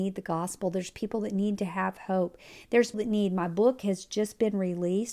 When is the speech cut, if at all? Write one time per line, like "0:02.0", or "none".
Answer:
0:02.9